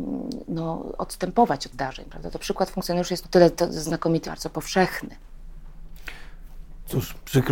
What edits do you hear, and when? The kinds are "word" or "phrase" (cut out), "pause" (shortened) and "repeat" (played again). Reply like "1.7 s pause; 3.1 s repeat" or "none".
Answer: 1.7 s word; 3.2 s word; 4.2 s phrase